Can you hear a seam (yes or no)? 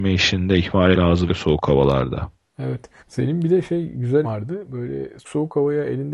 yes